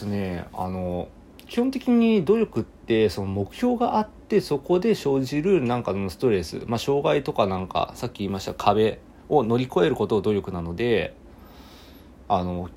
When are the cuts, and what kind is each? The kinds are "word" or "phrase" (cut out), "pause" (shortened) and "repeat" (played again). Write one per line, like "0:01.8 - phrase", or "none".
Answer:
none